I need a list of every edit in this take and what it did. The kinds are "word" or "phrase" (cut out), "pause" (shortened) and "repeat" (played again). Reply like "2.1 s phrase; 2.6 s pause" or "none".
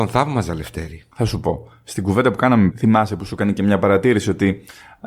2.7 s word